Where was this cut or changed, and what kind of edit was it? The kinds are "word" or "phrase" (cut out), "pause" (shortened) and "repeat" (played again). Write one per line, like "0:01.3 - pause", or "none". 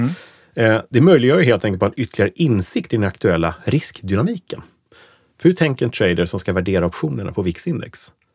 none